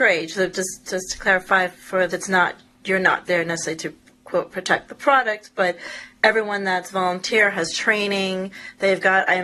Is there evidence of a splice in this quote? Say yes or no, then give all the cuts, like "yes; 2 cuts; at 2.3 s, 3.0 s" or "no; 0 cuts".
yes; 2 cuts; at 2.1 s, 3.3 s